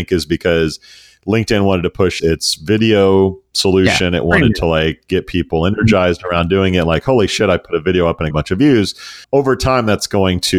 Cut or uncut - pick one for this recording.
cut